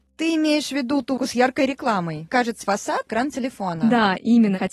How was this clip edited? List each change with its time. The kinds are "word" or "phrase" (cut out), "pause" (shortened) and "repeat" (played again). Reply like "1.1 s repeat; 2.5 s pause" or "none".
1.2 s word; 2.3 s word; 2.6 s word; 3.1 s word